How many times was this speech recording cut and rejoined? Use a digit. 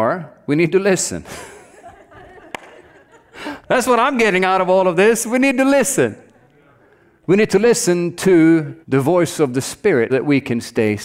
3